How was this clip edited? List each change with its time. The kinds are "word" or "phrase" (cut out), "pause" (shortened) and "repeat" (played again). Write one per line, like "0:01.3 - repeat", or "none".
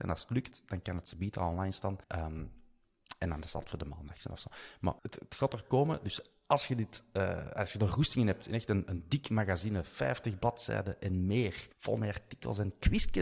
0:02.0 - pause
0:05.0 - pause
0:11.7 - pause